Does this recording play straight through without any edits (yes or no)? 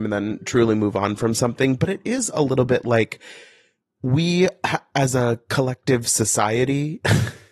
yes